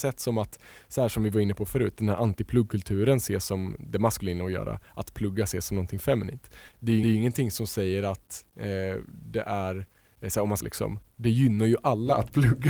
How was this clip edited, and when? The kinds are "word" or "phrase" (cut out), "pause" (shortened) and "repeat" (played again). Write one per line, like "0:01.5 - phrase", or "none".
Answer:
0:06.7 - pause
0:07.0 - repeat
0:10.6 - phrase